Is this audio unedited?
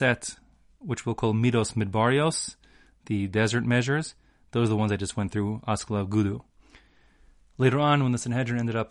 yes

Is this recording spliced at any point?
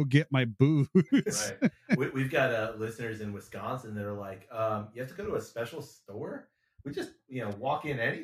no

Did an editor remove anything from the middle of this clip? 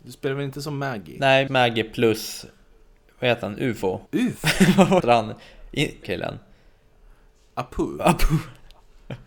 yes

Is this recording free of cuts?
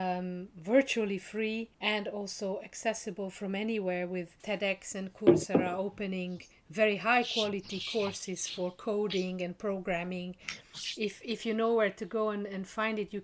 no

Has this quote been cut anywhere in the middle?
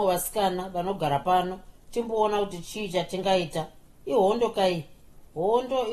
no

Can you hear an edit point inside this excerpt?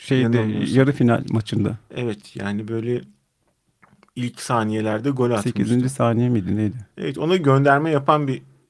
no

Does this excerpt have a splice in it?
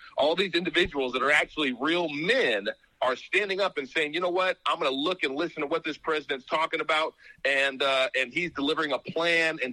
no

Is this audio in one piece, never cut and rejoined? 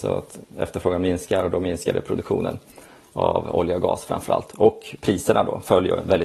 yes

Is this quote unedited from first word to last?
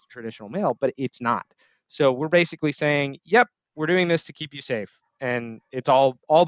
yes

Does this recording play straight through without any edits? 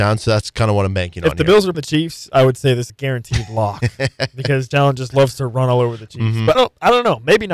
no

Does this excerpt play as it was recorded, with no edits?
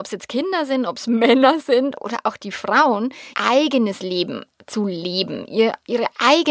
no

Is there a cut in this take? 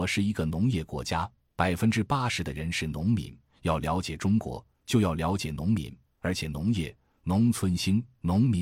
no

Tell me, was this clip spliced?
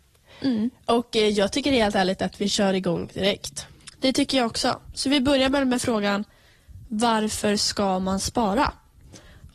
no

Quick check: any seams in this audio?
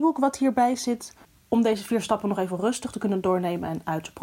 no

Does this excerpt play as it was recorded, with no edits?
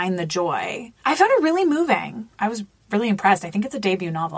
no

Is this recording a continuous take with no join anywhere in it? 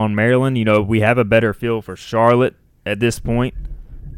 yes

